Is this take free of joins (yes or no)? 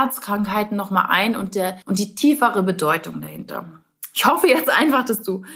no